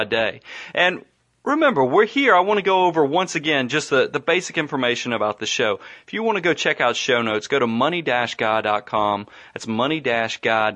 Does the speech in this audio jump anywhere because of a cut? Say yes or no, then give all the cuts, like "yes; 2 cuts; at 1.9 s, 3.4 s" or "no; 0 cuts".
no; 0 cuts